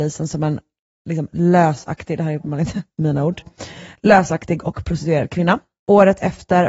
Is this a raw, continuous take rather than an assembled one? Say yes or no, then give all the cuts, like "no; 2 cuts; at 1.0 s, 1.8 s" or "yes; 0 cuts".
yes; 0 cuts